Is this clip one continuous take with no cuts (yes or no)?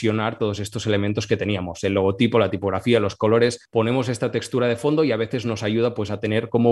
yes